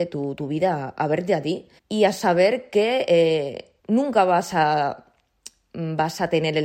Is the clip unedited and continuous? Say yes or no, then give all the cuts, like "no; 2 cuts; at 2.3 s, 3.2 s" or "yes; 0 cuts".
no; 2 cuts; at 1.8 s, 3.8 s